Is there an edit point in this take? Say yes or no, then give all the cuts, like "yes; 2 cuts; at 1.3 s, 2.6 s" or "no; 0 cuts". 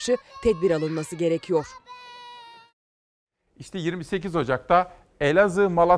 no; 0 cuts